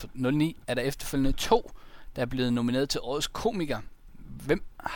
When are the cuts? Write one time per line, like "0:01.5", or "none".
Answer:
none